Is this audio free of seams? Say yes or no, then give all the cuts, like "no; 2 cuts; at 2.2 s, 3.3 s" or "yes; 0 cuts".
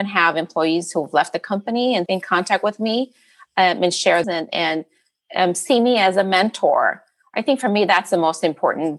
no; 2 cuts; at 2.1 s, 4.2 s